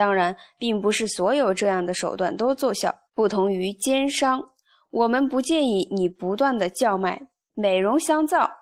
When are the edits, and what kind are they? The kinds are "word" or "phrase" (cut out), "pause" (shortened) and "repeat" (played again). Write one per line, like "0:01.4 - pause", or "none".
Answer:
0:03.1 - pause